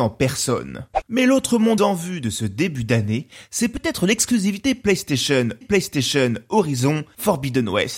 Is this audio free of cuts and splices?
no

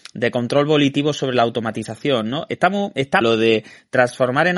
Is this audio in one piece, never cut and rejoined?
no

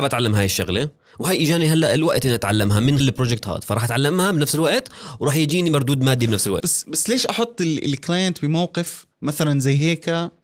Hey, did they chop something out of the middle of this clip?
yes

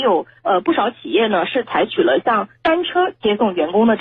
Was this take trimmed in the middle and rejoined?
yes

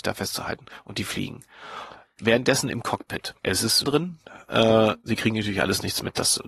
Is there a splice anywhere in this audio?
yes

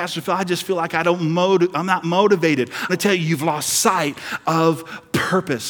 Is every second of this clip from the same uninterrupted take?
no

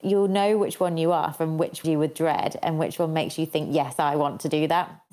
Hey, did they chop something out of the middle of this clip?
yes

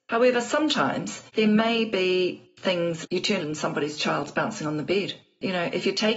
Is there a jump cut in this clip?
yes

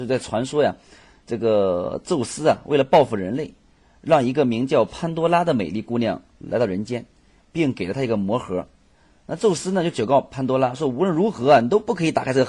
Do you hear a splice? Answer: no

